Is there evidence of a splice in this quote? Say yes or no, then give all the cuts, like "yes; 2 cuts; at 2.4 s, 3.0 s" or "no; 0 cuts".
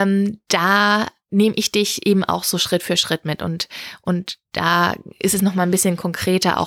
no; 0 cuts